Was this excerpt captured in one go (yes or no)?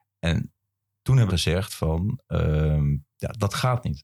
no